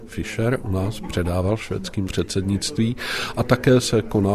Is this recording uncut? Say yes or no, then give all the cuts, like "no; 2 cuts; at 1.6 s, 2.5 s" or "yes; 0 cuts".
no; 1 cut; at 2.1 s